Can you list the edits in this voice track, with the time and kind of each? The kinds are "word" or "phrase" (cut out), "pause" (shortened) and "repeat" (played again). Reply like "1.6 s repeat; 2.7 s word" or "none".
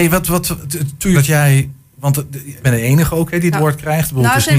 1.1 s word; 2.6 s word; 3.5 s word